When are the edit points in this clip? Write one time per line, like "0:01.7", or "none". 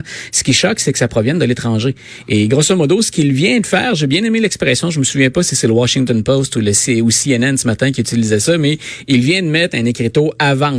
none